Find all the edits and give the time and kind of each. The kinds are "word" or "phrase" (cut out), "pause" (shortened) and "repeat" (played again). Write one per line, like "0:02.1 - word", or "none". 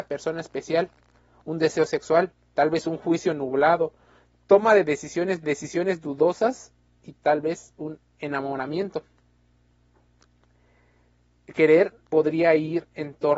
0:05.4 - repeat
0:12.0 - pause